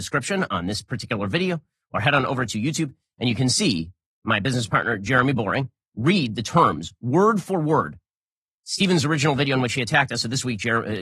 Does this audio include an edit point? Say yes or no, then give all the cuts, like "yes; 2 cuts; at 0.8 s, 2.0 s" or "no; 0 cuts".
no; 0 cuts